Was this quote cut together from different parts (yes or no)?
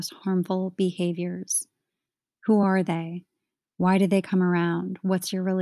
no